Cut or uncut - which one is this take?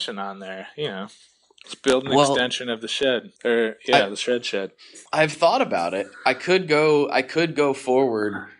cut